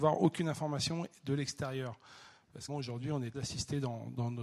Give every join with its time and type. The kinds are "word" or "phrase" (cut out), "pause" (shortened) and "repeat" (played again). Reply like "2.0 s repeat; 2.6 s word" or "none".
2.7 s word; 3.3 s word